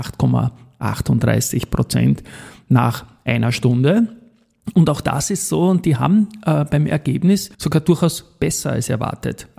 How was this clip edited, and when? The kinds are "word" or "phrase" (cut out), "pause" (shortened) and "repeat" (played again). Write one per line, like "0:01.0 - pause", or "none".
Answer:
0:07.5 - pause